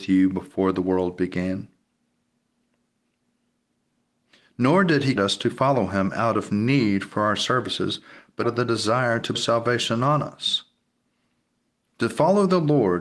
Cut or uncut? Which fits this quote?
cut